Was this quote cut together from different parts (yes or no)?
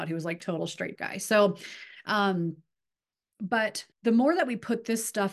yes